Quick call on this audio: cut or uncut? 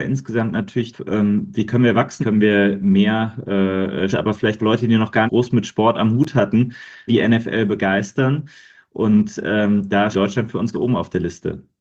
cut